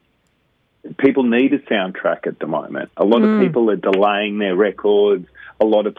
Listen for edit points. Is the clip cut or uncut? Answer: uncut